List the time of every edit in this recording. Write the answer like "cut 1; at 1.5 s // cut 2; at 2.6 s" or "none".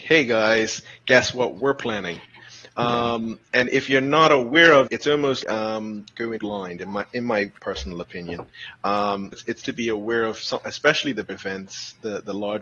cut 1; at 4.9 s // cut 2; at 5.4 s // cut 3; at 6.4 s // cut 4; at 9.3 s // cut 5; at 9.6 s // cut 6; at 11.3 s